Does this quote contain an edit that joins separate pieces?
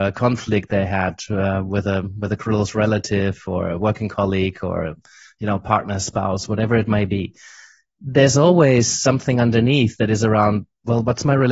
no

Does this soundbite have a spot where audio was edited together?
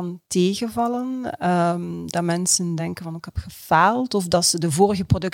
no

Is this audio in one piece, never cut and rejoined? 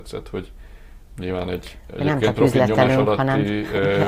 yes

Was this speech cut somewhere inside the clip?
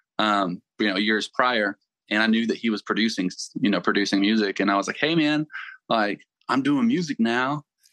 no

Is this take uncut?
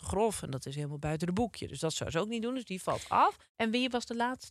yes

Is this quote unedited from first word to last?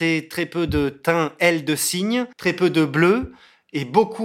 no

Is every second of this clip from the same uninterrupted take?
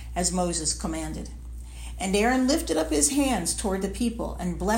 yes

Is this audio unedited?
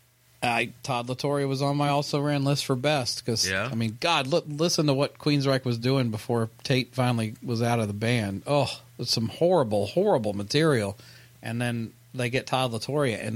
yes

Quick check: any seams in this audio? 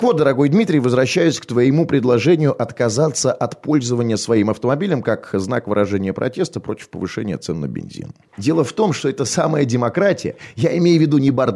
no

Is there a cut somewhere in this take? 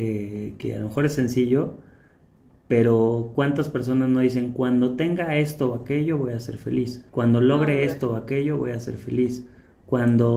yes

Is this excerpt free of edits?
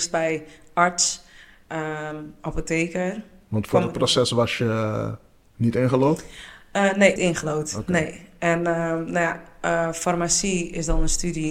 no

